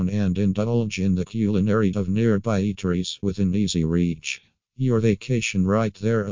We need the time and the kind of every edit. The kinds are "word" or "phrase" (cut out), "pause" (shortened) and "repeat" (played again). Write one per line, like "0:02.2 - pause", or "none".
0:01.9 - word
0:03.2 - word